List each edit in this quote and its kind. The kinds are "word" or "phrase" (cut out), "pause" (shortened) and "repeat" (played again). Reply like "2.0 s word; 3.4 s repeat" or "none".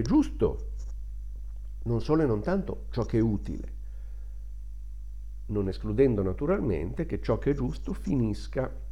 none